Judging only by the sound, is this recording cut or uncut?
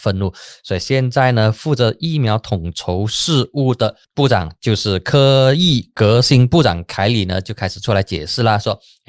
cut